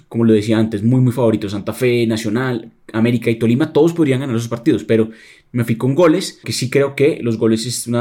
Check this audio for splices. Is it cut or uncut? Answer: cut